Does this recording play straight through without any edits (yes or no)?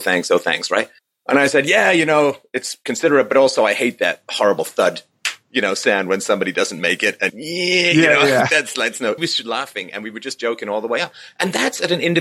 no